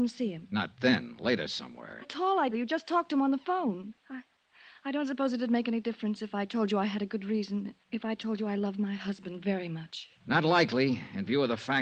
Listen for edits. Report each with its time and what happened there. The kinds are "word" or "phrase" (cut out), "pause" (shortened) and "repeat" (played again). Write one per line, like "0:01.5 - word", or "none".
0:02.0 - phrase
0:02.5 - word
0:04.0 - pause
0:07.8 - pause